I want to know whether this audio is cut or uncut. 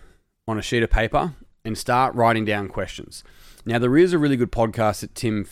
uncut